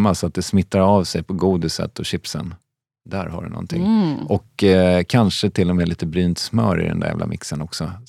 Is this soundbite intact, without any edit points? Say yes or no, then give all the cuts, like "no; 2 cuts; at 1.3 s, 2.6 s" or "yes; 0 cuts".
yes; 0 cuts